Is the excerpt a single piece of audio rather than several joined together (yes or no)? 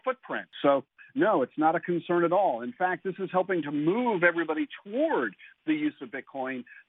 yes